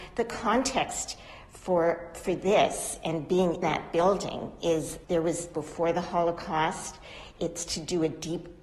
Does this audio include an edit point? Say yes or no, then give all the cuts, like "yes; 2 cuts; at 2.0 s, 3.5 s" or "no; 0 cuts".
yes; 3 cuts; at 3.6 s, 5.0 s, 5.5 s